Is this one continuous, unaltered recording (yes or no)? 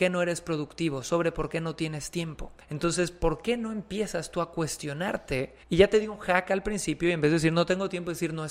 no